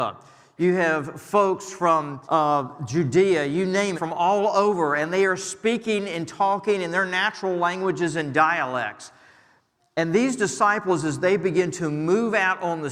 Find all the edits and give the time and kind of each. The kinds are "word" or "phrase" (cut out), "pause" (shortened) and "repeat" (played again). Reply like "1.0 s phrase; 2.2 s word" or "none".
2.2 s pause; 3.9 s phrase